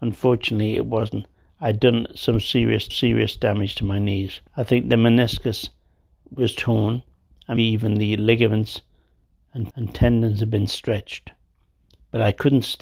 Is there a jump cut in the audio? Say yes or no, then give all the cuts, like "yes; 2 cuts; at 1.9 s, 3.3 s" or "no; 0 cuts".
yes; 4 cuts; at 2.9 s, 4.5 s, 7.6 s, 9.7 s